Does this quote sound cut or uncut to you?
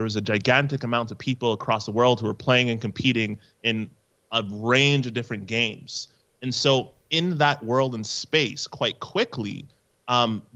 uncut